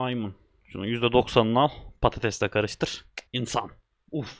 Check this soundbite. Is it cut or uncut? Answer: cut